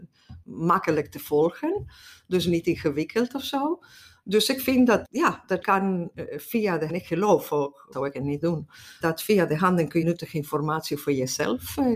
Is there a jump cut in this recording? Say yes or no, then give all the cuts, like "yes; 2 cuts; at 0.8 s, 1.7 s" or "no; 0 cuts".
yes; 6 cuts; at 5.0 s, 5.6 s, 6.9 s, 7.9 s, 9.0 s, 10.0 s